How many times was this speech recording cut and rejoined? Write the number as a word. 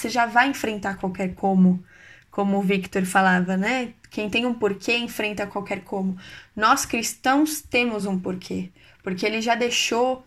zero